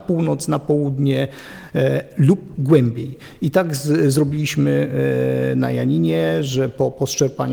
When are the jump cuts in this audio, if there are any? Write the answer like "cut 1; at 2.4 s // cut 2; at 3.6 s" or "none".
none

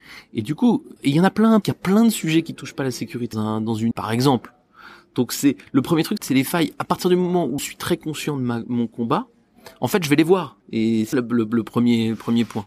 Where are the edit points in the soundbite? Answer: cut 1; at 1.0 s // cut 2; at 1.6 s // cut 3; at 3.3 s // cut 4; at 3.9 s // cut 5; at 6.2 s // cut 6; at 7.6 s // cut 7; at 10.6 s // cut 8; at 11.1 s

